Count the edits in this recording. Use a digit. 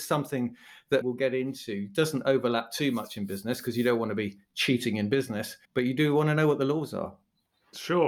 2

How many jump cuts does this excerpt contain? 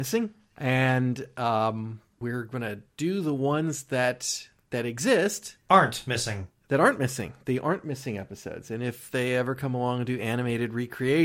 0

